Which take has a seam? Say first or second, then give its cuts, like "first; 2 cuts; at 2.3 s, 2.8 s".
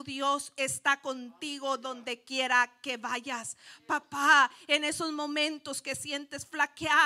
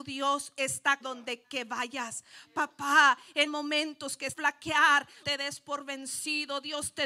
second; 5 cuts; at 1.0 s, 1.4 s, 3.5 s, 4.3 s, 5.2 s